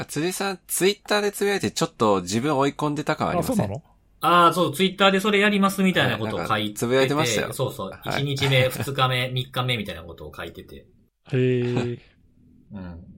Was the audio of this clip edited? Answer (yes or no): no